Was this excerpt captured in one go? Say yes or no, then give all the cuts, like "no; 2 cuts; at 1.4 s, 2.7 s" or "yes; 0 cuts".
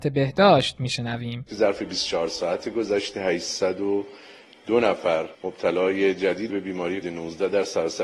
no; 3 cuts; at 5.3 s, 6.5 s, 7.0 s